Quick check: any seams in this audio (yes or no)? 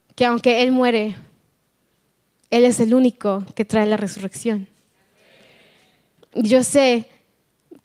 no